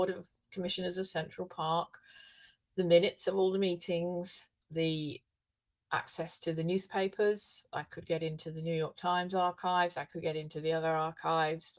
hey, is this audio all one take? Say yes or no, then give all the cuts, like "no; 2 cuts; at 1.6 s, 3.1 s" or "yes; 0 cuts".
no; 1 cut; at 4.6 s